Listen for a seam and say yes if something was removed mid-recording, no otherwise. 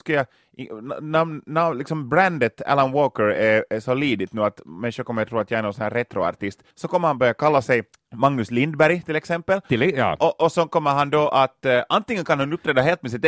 yes